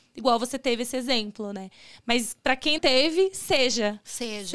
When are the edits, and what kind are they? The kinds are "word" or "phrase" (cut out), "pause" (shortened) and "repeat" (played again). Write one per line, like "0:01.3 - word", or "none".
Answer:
0:02.8 - word